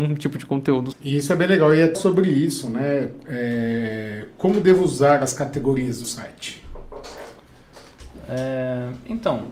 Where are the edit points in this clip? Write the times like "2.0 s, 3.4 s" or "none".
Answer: 0.9 s, 1.9 s, 6.0 s